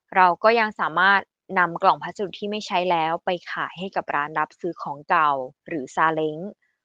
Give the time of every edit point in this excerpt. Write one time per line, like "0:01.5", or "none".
0:05.6